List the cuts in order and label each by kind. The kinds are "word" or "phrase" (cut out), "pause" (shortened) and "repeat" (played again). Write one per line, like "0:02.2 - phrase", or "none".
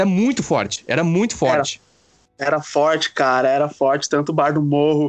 none